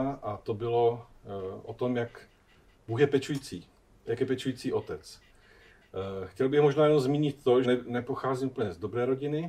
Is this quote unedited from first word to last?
no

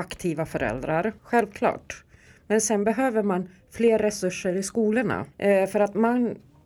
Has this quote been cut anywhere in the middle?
yes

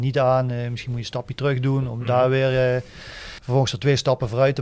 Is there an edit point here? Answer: no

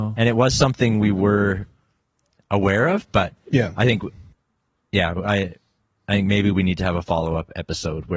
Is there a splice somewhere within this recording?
no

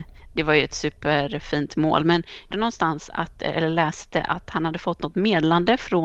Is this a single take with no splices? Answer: no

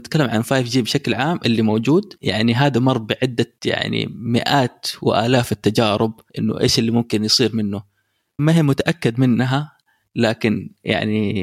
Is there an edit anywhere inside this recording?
yes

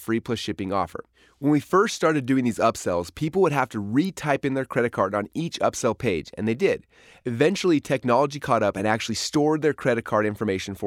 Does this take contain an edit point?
no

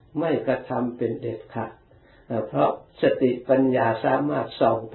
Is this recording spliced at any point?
yes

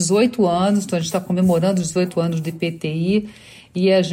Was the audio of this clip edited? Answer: no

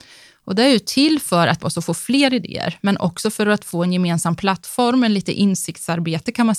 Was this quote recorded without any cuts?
no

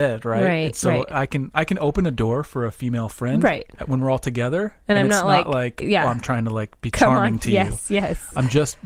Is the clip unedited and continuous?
no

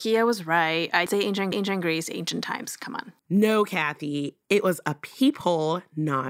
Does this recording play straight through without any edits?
no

